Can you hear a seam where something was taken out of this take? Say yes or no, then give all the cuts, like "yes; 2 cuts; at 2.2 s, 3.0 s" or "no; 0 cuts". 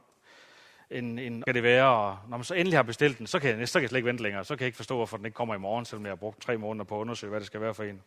yes; 1 cut; at 1.5 s